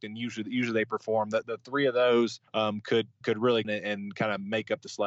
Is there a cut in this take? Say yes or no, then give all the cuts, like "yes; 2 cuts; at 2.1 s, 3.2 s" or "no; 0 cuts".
yes; 4 cuts; at 1.4 s, 2.5 s, 3.2 s, 3.6 s